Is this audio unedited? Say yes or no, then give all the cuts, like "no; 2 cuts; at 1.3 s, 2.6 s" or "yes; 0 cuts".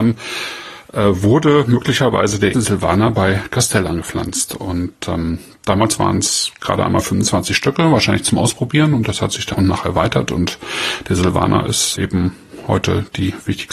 no; 3 cuts; at 2.5 s, 9.5 s, 12.0 s